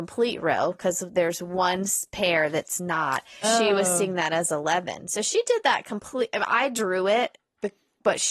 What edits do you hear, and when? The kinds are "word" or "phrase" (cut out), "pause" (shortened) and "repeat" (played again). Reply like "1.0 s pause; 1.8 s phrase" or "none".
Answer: 3.4 s word